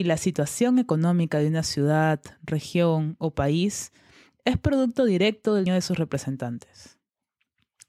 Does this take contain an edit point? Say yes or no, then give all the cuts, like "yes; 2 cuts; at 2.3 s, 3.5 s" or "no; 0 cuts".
yes; 1 cut; at 5.7 s